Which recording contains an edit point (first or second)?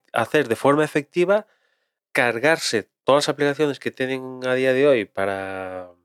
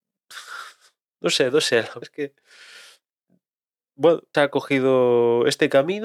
second